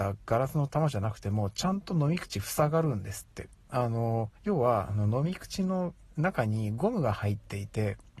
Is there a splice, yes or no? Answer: yes